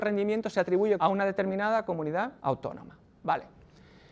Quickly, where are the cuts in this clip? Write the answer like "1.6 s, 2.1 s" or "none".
1.0 s, 2.4 s